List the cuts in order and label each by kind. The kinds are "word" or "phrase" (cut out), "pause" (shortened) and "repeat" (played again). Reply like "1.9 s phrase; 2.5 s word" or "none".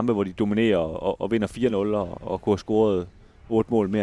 none

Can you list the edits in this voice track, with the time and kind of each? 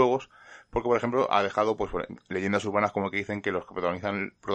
none

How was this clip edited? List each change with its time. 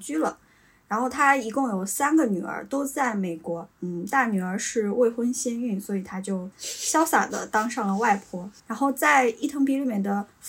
3.7 s pause; 8.6 s pause

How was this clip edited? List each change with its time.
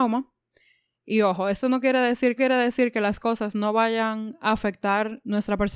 2.4 s repeat

